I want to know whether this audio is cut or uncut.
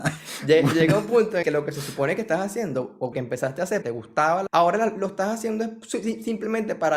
cut